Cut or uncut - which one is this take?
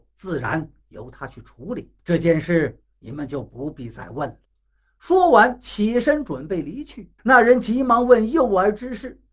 cut